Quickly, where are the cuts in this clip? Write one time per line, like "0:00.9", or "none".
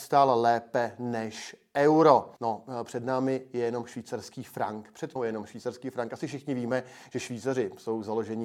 0:02.4
0:05.2